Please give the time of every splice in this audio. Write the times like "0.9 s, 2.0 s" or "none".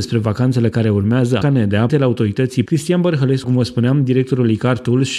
1.4 s, 1.9 s, 2.7 s, 3.4 s